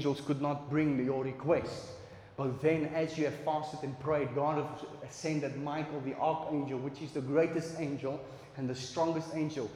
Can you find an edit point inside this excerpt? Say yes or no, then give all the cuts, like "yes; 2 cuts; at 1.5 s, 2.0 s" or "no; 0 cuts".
no; 0 cuts